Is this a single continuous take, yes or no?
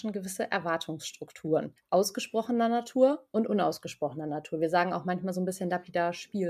no